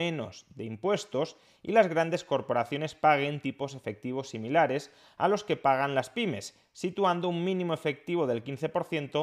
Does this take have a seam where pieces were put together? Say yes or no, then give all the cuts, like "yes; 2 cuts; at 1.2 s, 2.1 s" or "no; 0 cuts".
no; 0 cuts